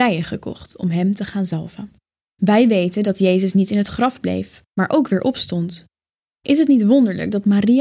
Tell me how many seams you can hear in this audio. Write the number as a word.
one